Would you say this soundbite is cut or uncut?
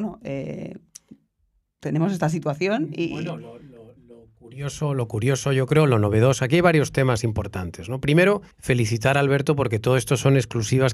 cut